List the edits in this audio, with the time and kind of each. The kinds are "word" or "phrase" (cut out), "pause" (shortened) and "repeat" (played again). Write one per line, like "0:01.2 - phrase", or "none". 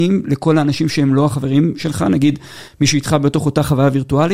none